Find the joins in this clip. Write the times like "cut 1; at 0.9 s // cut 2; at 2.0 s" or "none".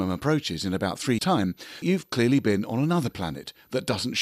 cut 1; at 1.2 s // cut 2; at 1.8 s